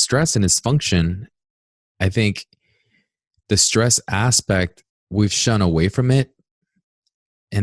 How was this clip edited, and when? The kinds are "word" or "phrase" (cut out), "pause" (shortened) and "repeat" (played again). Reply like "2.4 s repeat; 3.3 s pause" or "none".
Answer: 4.9 s pause